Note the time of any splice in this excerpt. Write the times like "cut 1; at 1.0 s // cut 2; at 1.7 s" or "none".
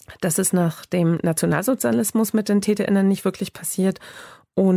none